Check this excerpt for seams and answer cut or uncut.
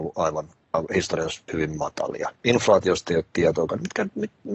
cut